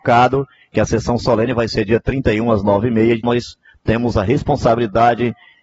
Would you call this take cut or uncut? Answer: cut